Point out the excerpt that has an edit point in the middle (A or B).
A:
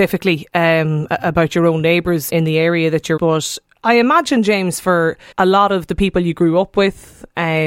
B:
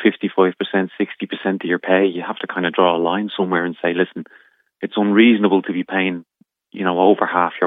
A